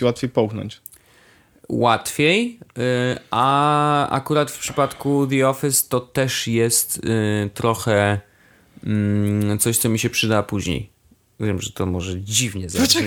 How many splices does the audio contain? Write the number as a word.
zero